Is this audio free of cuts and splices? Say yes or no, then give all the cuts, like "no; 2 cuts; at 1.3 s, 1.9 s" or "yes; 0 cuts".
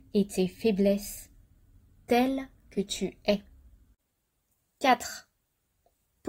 yes; 0 cuts